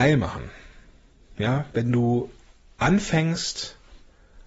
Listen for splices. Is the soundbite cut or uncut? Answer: uncut